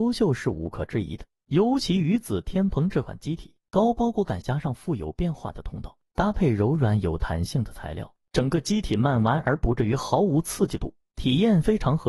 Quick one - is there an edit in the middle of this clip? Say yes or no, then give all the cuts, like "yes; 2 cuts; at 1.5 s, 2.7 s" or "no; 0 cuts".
yes; 1 cut; at 4.4 s